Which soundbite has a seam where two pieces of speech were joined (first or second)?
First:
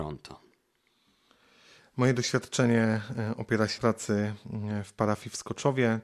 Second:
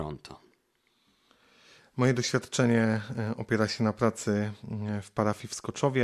first